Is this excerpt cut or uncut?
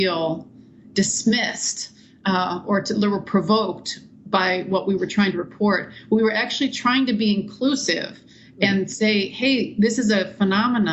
uncut